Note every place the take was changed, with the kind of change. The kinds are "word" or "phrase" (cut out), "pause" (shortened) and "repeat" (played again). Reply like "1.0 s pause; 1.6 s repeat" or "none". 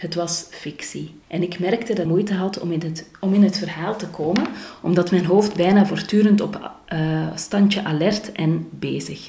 1.2 s pause; 2.1 s phrase